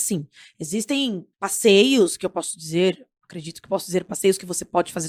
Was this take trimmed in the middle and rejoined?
yes; 1 cut; at 1.3 s

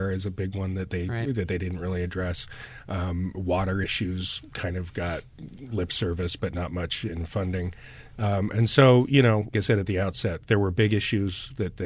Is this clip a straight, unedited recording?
no; 1 cut; at 9.5 s

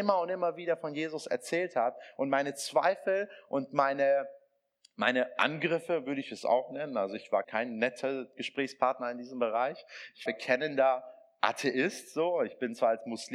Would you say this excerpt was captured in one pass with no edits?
no; 2 cuts; at 7.4 s, 10.3 s

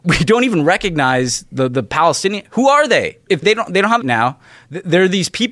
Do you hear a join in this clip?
yes; 2 cuts; at 3.4 s, 4.0 s

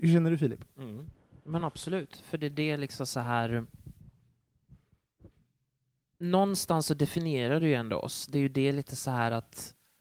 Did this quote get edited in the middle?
no; 0 cuts

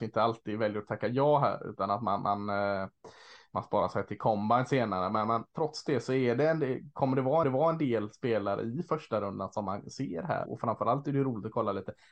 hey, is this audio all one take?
no; 3 cuts; at 5.5 s, 7.4 s, 10.5 s

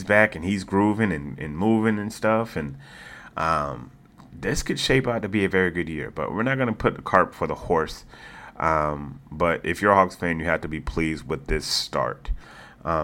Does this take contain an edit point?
no; 0 cuts

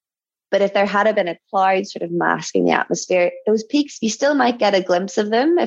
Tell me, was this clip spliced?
no; 0 cuts

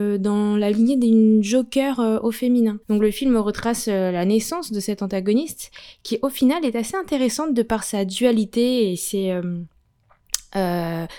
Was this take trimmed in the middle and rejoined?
yes; 1 cut; at 2.8 s

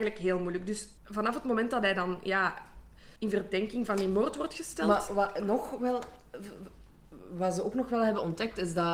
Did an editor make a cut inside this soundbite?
yes; 2 cuts; at 1.0 s, 3.2 s

